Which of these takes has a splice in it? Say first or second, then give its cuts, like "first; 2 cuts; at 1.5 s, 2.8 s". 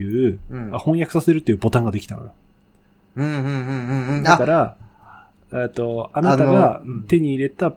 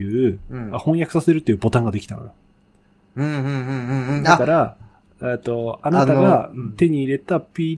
second; 1 cut; at 4.9 s